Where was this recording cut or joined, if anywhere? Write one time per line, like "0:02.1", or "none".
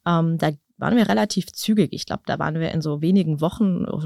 none